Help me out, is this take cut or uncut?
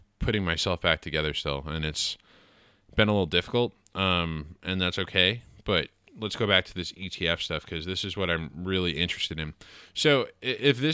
uncut